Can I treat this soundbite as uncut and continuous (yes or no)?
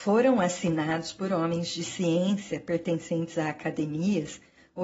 yes